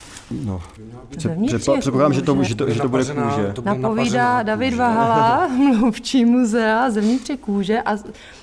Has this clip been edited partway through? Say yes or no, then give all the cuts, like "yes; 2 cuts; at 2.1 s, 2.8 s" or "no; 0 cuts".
no; 0 cuts